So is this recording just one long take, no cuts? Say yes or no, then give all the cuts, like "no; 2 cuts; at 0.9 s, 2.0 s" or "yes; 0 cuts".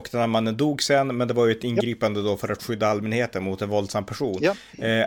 yes; 0 cuts